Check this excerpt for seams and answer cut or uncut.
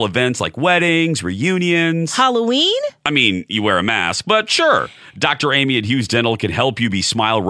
uncut